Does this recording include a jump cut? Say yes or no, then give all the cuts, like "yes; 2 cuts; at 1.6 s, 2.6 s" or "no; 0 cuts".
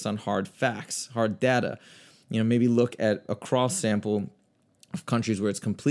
no; 0 cuts